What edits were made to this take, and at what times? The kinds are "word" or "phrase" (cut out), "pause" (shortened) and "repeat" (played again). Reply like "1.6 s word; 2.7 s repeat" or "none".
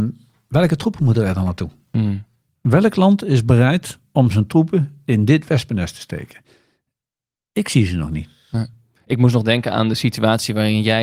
none